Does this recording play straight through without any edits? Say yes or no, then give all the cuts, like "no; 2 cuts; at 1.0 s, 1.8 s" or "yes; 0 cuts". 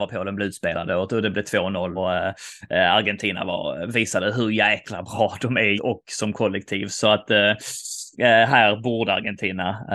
no; 3 cuts; at 2.0 s, 5.8 s, 8.1 s